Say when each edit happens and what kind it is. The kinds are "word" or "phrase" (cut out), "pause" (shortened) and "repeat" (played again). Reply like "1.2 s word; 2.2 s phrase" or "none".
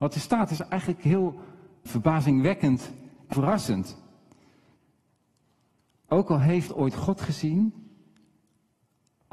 1.9 s word; 3.3 s word; 6.7 s word